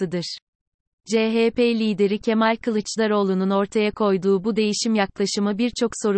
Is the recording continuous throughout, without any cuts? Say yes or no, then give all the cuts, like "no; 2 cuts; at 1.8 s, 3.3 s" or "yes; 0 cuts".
yes; 0 cuts